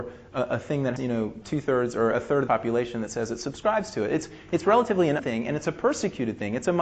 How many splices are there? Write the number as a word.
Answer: four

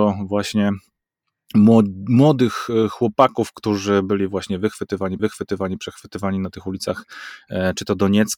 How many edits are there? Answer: one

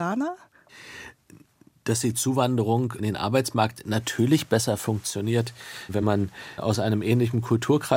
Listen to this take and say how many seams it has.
zero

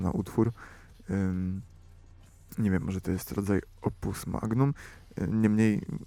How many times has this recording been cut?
zero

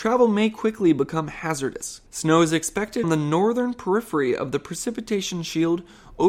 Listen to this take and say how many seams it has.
two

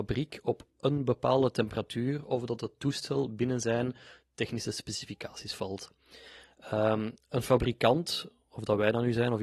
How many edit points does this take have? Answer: zero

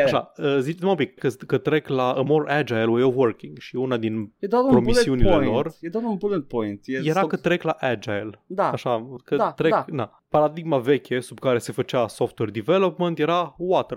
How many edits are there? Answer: one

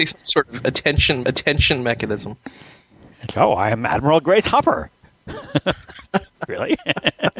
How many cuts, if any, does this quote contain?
two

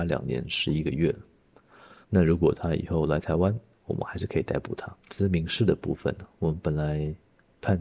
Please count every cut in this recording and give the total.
two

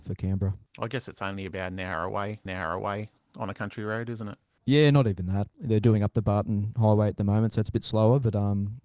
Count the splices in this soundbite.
one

